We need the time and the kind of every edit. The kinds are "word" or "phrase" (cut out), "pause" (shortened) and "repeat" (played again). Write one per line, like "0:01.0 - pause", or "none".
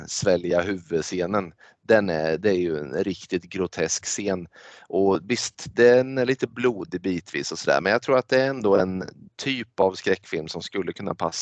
none